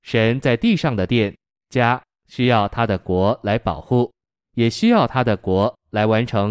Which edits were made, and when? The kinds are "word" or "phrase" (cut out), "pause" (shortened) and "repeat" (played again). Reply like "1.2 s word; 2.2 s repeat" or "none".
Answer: none